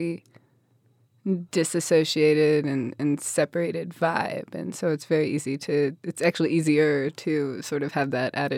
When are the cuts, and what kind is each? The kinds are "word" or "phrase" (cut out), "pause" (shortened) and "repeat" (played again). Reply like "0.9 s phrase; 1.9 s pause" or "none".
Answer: 1.5 s pause